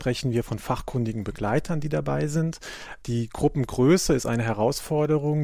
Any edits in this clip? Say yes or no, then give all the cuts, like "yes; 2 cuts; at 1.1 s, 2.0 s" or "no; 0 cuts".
no; 0 cuts